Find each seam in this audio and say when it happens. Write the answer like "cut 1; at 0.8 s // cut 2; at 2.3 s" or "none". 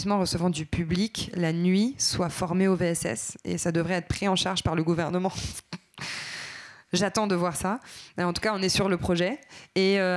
none